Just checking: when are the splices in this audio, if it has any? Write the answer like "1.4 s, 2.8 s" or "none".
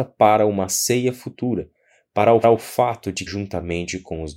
2.4 s, 3.3 s